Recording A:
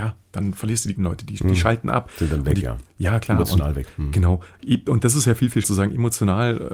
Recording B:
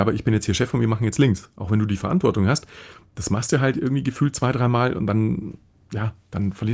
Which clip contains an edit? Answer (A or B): A